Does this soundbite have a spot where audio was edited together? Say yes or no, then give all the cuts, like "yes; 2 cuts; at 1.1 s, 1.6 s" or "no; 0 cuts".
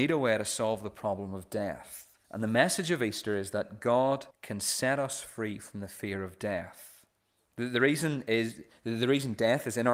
yes; 2 cuts; at 2.2 s, 4.3 s